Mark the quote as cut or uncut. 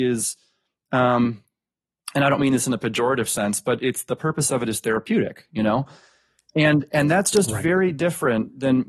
uncut